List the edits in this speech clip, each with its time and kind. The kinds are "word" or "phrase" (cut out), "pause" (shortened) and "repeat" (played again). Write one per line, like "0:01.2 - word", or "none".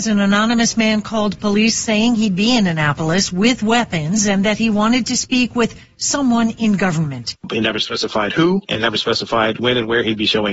none